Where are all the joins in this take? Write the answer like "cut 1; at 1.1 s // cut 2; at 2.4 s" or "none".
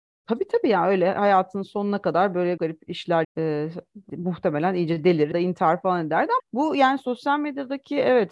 cut 1; at 2.6 s // cut 2; at 3.2 s // cut 3; at 4.1 s // cut 4; at 5.3 s // cut 5; at 6.4 s